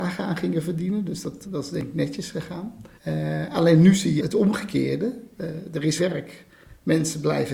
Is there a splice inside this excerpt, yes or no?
yes